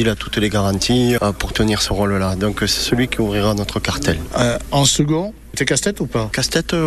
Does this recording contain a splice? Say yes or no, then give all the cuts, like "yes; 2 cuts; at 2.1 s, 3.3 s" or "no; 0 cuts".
yes; 2 cuts; at 1.2 s, 5.5 s